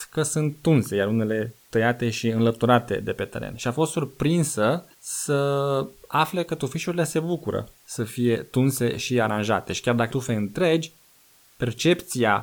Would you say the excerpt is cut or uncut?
cut